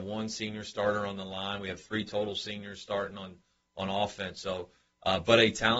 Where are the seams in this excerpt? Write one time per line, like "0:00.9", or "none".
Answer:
none